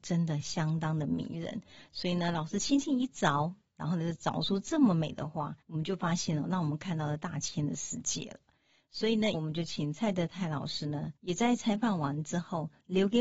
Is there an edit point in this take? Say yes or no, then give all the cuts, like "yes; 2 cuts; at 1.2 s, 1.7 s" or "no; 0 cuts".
yes; 3 cuts; at 5.6 s, 9.3 s, 11.2 s